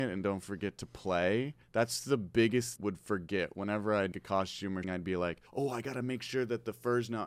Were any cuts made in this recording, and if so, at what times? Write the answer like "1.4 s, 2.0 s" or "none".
1.6 s, 2.8 s, 4.1 s, 4.8 s, 5.5 s